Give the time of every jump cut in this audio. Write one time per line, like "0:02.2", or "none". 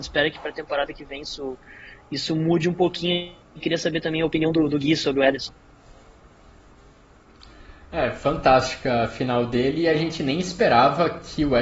0:03.4